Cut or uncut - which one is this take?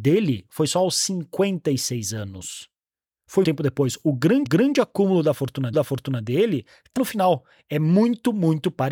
cut